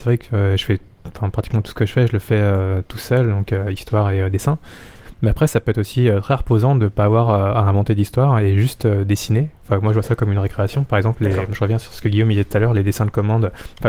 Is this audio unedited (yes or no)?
yes